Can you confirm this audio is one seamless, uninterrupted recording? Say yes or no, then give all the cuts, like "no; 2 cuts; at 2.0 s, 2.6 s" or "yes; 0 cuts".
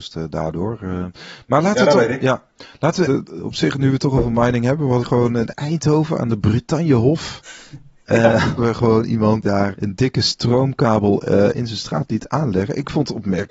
no; 6 cuts; at 3.0 s, 5.0 s, 8.6 s, 9.4 s, 9.7 s, 11.5 s